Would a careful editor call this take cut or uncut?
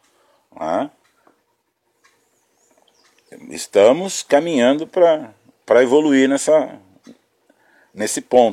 uncut